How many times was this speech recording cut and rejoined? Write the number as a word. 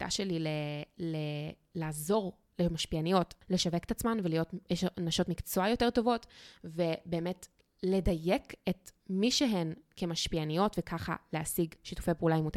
one